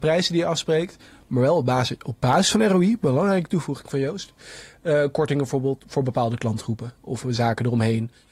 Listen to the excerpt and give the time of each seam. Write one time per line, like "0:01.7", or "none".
none